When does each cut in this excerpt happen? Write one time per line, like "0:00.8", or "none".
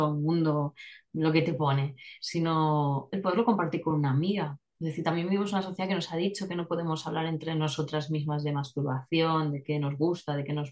none

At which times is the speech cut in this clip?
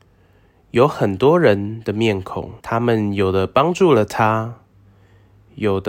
0:02.6

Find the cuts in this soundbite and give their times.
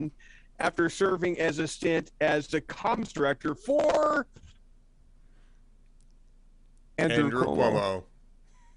none

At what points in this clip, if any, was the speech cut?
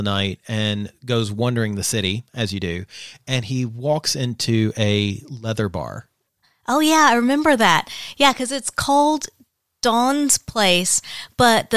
none

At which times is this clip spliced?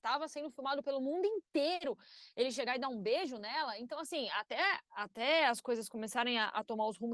none

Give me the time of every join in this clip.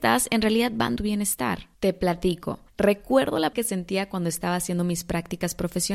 0:01.0
0:01.7
0:02.7
0:03.5

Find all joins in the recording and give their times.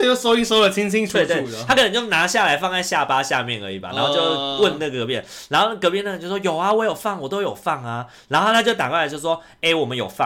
none

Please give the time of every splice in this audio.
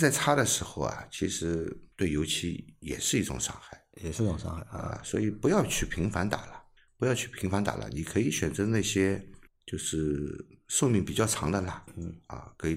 0:01.9
0:06.8
0:09.5

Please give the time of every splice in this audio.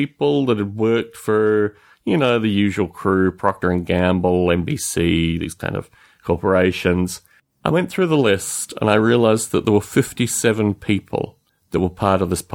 none

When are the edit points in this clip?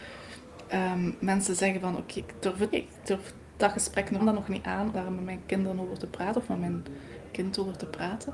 0:02.2
0:02.7
0:04.2
0:04.9

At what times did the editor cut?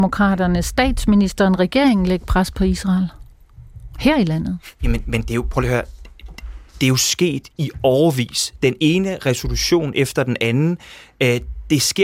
none

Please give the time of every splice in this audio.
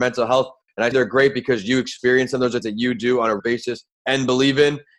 0:00.9
0:02.6
0:03.4
0:03.9

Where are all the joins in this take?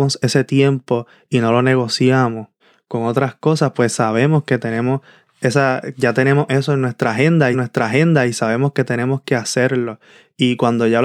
0:02.6
0:07.5

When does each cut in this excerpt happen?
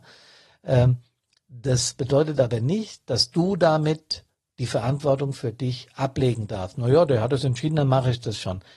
none

